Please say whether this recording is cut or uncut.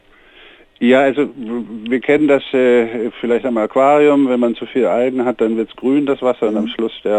uncut